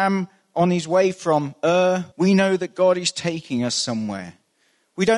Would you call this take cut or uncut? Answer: cut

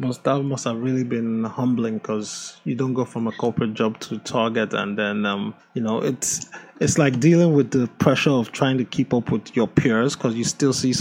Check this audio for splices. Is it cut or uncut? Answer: cut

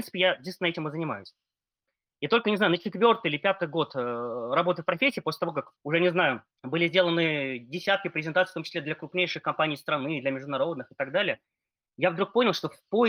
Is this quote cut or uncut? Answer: cut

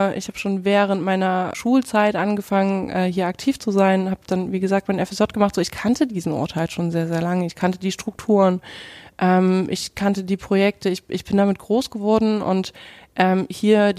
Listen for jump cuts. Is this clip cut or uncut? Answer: cut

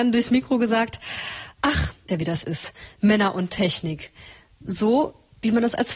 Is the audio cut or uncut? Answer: cut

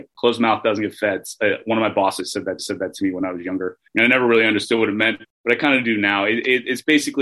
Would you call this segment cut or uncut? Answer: cut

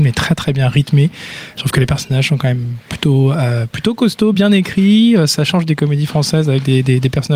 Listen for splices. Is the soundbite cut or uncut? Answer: uncut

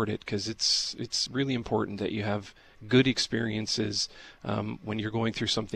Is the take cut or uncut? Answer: uncut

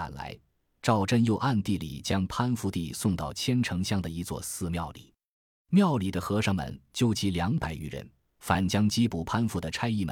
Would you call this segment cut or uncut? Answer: uncut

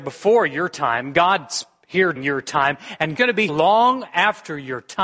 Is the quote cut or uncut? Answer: cut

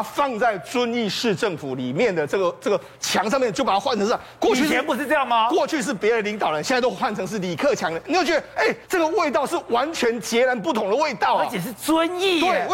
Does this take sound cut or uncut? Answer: cut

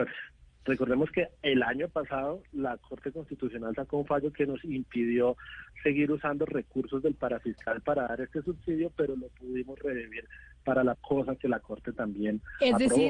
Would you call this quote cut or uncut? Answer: cut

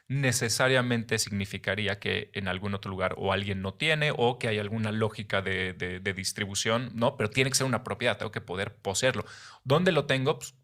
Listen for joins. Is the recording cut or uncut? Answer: uncut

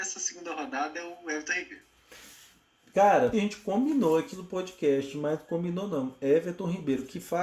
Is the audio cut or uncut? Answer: cut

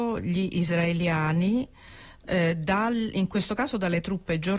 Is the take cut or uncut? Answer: uncut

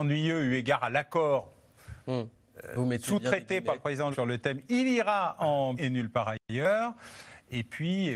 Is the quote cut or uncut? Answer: cut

